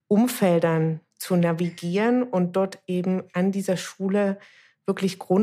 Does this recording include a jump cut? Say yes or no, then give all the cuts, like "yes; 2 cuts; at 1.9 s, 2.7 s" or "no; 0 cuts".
no; 0 cuts